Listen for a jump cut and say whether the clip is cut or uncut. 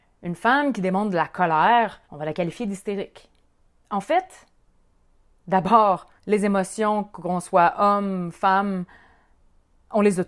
cut